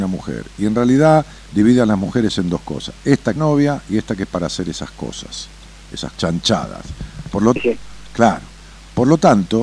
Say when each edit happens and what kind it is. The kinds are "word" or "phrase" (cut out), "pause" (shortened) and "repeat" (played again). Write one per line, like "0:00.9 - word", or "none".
0:03.4 - phrase
0:06.1 - phrase
0:07.6 - word